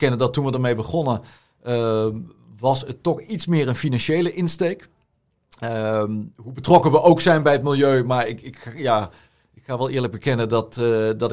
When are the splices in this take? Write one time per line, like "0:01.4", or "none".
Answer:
none